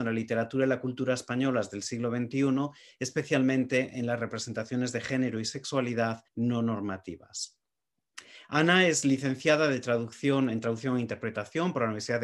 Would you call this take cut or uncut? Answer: cut